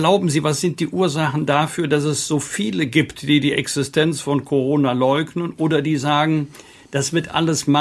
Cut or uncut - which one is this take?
uncut